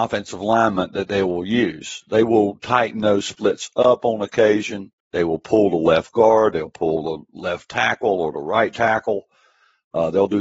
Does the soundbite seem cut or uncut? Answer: cut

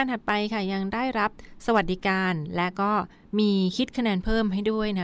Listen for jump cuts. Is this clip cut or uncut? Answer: uncut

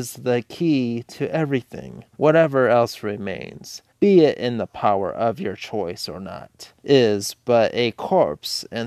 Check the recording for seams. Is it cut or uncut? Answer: cut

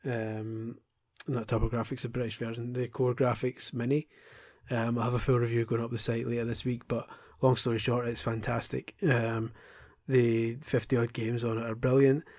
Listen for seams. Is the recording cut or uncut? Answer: uncut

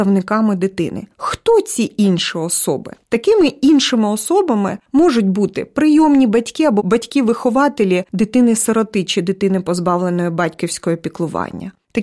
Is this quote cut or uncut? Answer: uncut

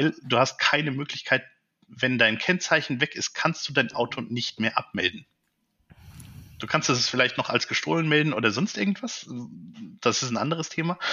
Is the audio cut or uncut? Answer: uncut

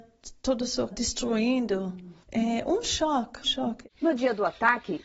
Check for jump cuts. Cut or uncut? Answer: cut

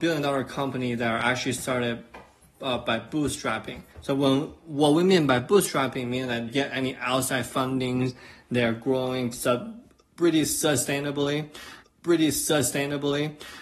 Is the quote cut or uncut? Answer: cut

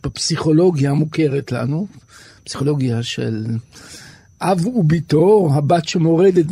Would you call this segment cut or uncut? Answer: uncut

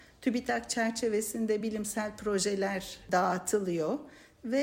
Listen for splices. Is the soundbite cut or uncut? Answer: uncut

